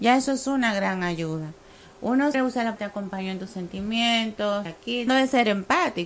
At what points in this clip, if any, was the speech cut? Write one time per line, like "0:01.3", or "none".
0:02.3
0:02.8
0:04.6
0:05.1